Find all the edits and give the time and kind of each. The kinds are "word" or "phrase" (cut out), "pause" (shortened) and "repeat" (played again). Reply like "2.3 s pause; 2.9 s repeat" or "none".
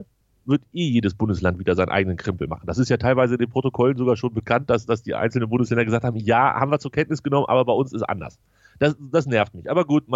none

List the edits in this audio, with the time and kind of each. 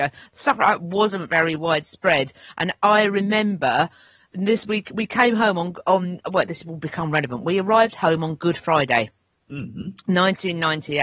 none

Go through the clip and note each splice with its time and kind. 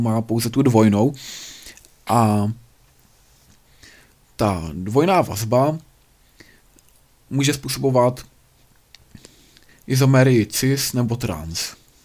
none

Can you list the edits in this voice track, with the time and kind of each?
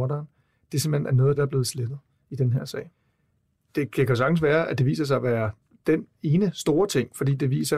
1.4 s phrase

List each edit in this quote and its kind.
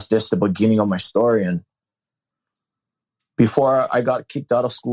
none

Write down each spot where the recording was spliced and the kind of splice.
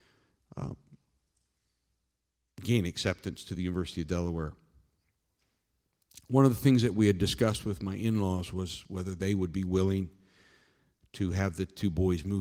none

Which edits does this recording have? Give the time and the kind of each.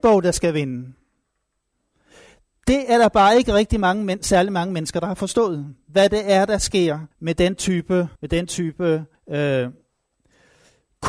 7.1 s pause; 8.2 s pause; 9.1 s pause

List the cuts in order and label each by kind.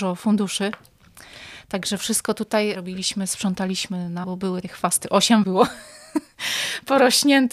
2.0 s word; 2.7 s word; 4.2 s word; 4.6 s word; 5.4 s word

